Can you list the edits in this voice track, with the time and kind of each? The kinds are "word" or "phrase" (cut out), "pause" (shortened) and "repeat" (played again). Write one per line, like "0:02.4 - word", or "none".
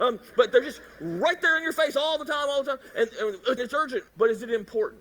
0:03.6 - word
0:04.1 - pause